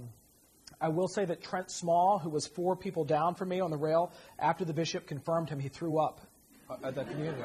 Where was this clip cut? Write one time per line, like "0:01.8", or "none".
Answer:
none